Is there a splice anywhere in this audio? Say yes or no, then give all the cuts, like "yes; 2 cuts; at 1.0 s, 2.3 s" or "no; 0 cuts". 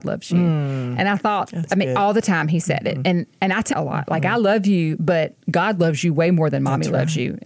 yes; 1 cut; at 3.7 s